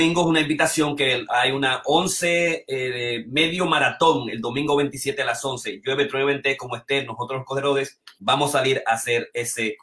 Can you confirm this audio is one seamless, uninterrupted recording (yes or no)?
no